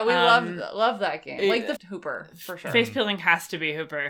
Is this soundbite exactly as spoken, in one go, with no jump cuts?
no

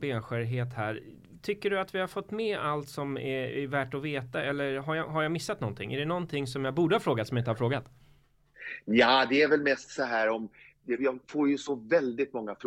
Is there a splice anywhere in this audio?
yes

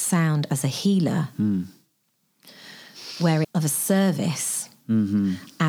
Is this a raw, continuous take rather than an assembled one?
no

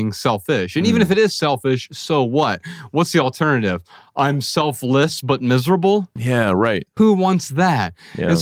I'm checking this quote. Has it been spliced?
no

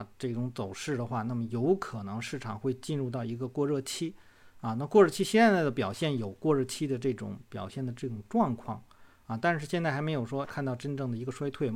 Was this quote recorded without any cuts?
no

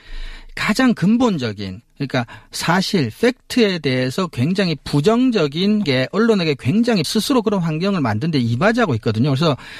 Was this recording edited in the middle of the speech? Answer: yes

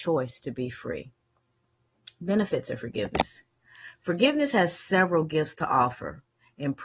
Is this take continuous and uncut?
yes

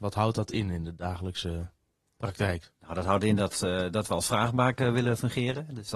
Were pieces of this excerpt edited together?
no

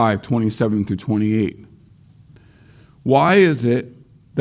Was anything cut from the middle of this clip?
no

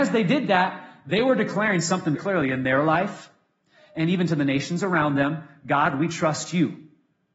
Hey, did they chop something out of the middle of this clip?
yes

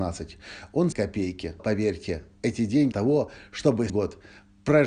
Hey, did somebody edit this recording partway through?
yes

